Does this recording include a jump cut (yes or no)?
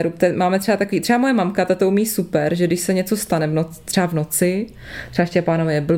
no